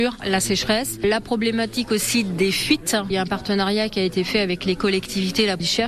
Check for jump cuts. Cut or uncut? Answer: uncut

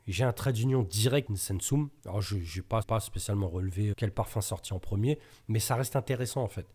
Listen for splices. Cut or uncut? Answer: cut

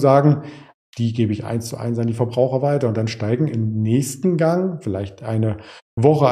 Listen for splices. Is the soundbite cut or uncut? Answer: uncut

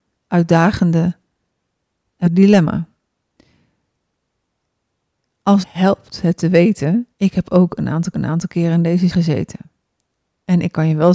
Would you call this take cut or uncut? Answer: cut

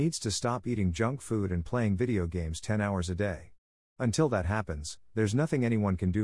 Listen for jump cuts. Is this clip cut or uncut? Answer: uncut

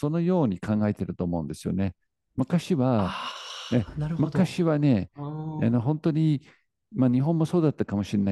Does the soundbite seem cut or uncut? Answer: uncut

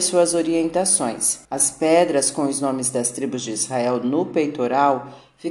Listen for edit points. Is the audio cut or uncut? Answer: cut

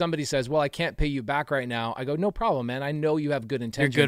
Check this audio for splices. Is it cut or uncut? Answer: uncut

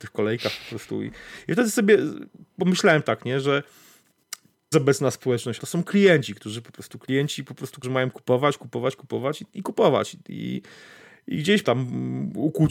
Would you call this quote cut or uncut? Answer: cut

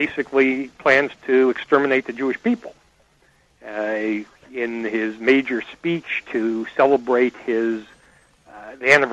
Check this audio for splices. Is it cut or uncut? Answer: uncut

